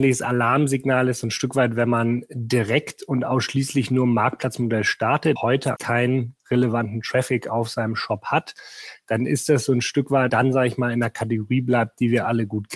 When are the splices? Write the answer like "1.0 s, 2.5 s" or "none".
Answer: 5.4 s, 5.8 s, 10.3 s